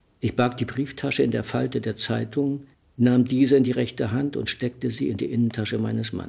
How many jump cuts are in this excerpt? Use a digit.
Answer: 1